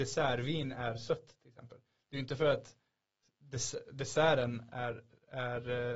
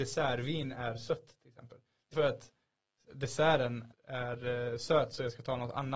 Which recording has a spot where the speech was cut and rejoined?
second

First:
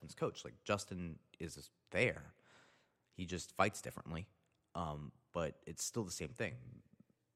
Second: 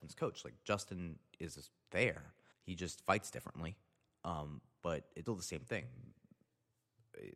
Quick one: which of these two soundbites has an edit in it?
second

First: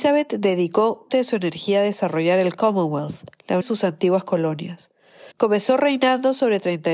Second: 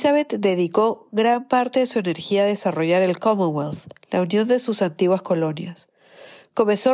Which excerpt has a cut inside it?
first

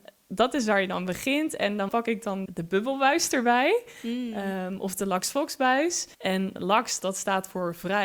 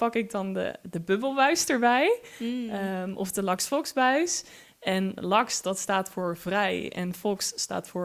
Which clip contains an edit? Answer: first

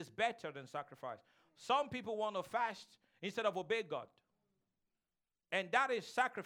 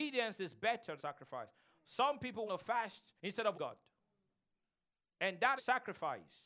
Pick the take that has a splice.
second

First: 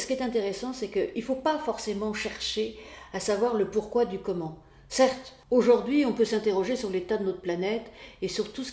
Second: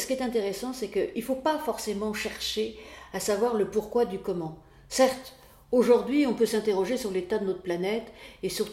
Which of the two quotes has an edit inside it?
first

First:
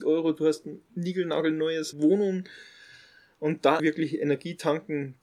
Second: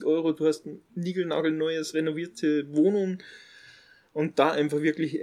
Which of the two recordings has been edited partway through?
first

